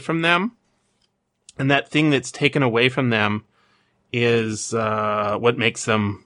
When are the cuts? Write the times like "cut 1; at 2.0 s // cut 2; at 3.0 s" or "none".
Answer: none